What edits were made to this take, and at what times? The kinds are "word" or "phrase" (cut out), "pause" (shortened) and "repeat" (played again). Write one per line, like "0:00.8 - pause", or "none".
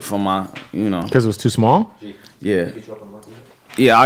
none